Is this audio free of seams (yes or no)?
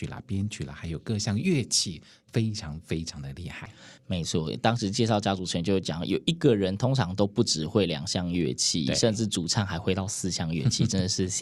yes